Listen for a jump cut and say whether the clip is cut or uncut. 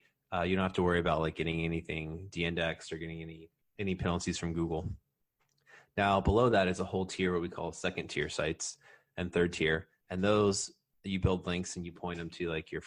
uncut